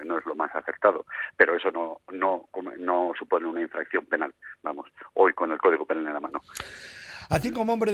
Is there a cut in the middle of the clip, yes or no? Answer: no